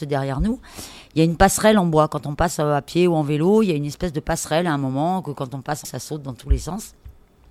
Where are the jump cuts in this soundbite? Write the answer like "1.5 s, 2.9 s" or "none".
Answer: 5.8 s